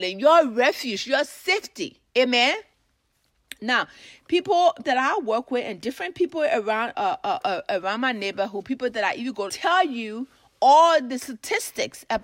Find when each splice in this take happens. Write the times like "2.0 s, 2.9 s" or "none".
2.1 s, 4.8 s, 6.9 s, 9.5 s